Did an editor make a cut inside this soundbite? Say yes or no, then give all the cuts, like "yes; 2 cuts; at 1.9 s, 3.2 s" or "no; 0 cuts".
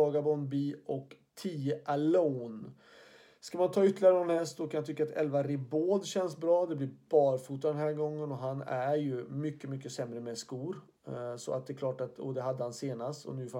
no; 0 cuts